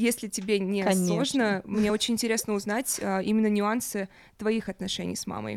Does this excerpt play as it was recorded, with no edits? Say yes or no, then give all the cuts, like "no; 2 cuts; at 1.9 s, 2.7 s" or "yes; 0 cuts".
yes; 0 cuts